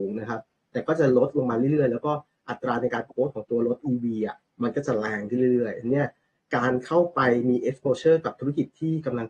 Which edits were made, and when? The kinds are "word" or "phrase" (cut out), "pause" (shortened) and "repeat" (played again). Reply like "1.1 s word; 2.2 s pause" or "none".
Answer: none